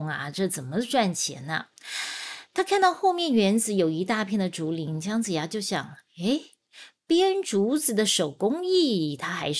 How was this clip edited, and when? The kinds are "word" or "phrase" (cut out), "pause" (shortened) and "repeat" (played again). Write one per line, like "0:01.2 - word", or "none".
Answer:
none